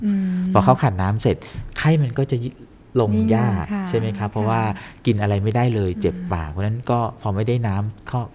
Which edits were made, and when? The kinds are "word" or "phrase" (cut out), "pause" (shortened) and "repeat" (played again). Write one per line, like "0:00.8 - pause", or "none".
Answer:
none